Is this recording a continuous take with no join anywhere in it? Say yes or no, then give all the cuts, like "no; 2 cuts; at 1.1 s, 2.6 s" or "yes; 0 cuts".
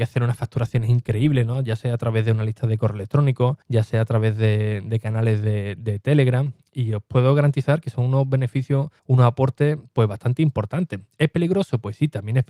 no; 2 cuts; at 3.6 s, 9.0 s